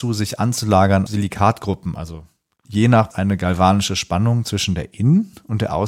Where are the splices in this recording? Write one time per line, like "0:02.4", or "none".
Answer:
0:01.1
0:02.6
0:03.1